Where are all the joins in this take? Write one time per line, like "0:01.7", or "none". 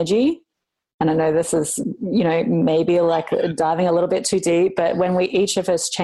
none